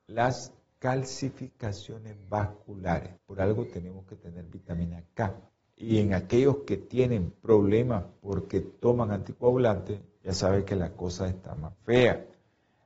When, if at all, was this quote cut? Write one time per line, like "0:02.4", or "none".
0:03.2
0:05.6